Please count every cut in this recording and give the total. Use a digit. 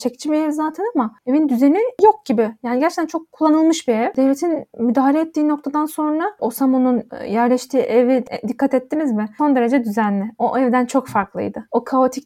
0